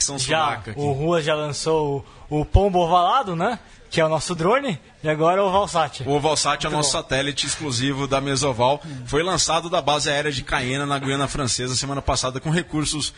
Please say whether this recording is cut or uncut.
uncut